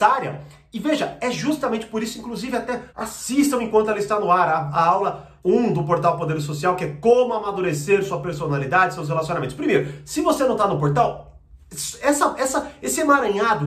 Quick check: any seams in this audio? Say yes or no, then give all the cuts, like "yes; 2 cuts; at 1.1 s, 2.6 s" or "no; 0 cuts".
yes; 3 cuts; at 2.9 s, 5.4 s, 11.6 s